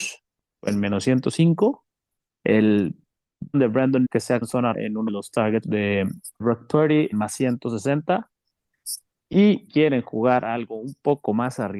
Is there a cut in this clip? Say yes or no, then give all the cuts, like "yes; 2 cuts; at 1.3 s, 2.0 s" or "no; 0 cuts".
yes; 9 cuts; at 3.5 s, 4.0 s, 4.4 s, 4.7 s, 5.1 s, 5.6 s, 6.4 s, 7.1 s, 9.7 s